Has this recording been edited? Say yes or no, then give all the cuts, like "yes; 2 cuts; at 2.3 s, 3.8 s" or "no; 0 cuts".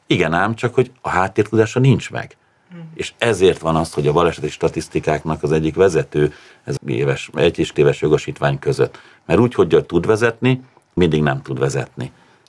yes; 3 cuts; at 6.8 s, 7.7 s, 11.0 s